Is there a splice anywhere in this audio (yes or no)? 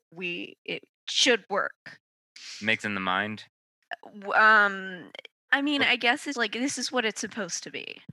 yes